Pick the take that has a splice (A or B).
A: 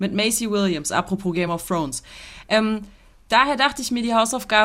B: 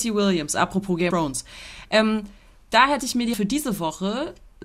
B